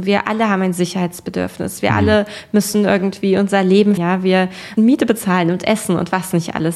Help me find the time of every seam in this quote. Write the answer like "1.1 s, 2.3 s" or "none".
4.0 s, 4.8 s

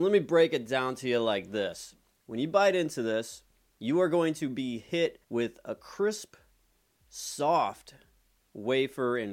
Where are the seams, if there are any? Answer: 5.2 s

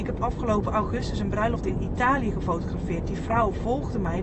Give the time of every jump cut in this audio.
none

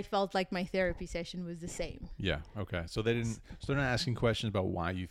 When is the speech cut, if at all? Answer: none

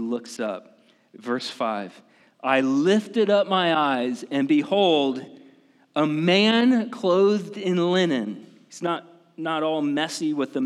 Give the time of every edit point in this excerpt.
none

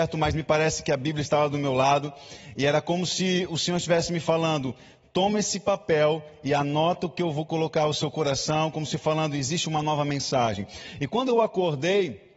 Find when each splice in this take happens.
none

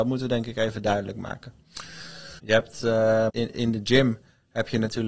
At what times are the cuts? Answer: 2.4 s, 3.3 s

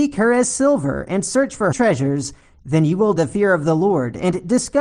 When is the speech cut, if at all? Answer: 1.7 s, 3.2 s

